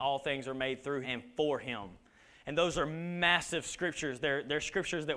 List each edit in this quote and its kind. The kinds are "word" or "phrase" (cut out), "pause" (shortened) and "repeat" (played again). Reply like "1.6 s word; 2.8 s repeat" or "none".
1.0 s phrase